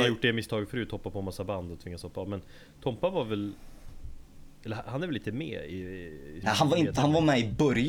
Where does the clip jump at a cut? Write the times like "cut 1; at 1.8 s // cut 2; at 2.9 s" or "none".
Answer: cut 1; at 6.4 s